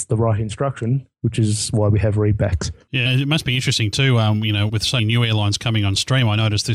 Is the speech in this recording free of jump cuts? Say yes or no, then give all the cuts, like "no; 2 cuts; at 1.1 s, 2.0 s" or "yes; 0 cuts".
no; 3 cuts; at 3.1 s, 4.7 s, 5.0 s